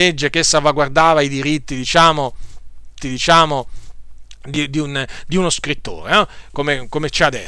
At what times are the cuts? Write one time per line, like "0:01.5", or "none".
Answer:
0:03.0